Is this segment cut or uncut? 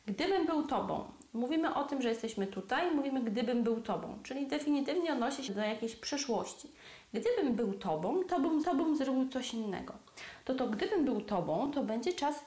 cut